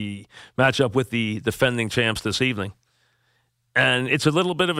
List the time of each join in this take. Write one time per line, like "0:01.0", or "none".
none